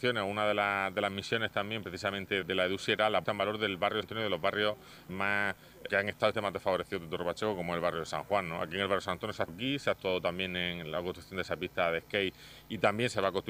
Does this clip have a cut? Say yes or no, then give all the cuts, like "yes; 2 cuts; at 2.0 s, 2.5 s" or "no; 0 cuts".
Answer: yes; 7 cuts; at 2.4 s, 3.2 s, 4.0 s, 5.1 s, 5.9 s, 6.3 s, 9.5 s